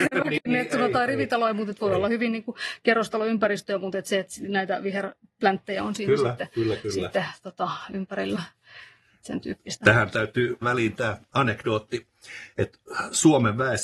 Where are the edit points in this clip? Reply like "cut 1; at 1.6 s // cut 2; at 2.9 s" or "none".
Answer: cut 1; at 10.6 s